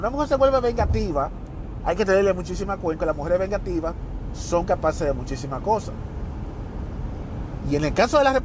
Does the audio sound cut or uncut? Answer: cut